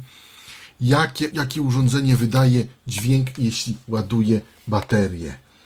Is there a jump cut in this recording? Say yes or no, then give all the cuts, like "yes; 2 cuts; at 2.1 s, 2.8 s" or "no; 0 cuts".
yes; 1 cut; at 1.3 s